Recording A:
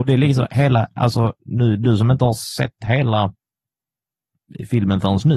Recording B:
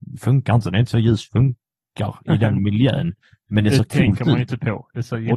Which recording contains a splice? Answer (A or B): B